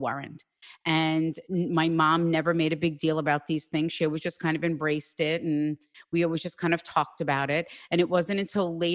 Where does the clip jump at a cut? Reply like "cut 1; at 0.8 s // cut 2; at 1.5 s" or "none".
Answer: none